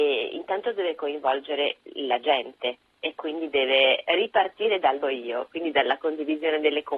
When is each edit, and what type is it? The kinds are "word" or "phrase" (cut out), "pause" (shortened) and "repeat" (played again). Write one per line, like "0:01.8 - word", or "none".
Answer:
0:04.1 - word
0:05.0 - phrase